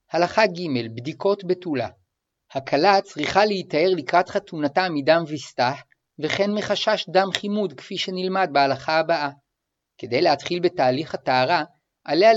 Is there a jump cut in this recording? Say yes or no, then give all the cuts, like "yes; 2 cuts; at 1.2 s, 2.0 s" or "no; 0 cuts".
no; 0 cuts